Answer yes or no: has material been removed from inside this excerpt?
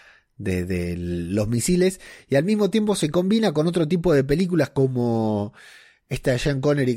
no